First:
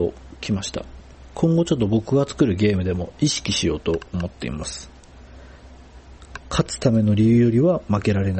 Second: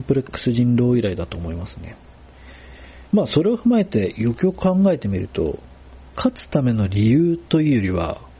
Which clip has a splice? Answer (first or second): second